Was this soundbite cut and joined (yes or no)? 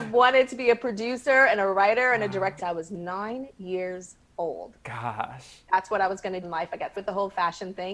yes